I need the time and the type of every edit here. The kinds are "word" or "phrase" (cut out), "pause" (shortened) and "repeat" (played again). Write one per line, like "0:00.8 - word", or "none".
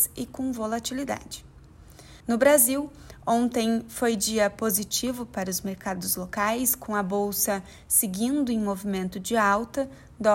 0:02.2 - pause